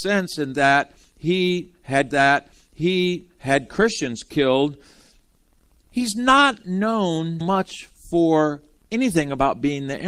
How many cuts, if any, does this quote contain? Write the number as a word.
two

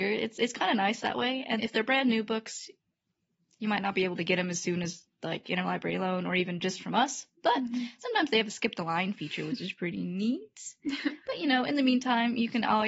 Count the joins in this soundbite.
two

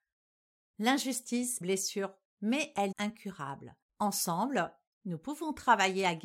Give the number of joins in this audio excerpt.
four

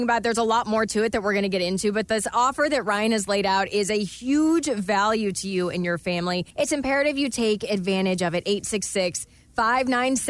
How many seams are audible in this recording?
one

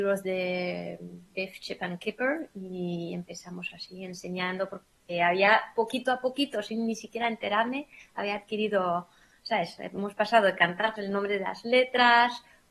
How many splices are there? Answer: one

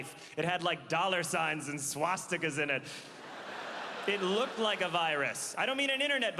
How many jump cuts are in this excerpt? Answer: zero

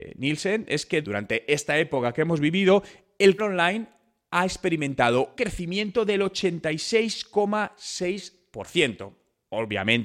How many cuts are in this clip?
three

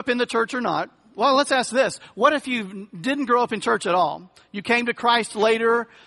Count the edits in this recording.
zero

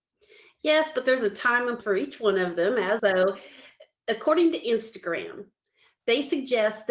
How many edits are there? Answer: two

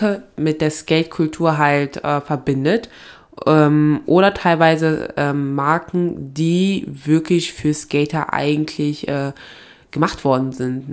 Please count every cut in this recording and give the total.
zero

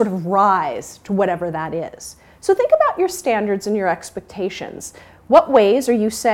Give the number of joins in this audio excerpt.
zero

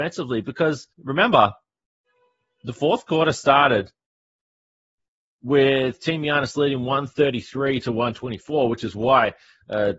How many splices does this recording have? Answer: one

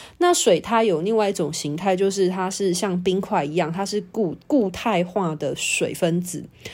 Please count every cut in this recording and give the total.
one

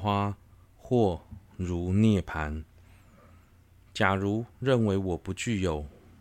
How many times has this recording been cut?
one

